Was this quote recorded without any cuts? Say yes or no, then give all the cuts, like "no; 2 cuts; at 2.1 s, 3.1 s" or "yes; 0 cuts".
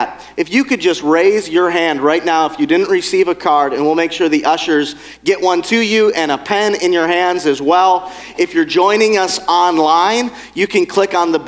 yes; 0 cuts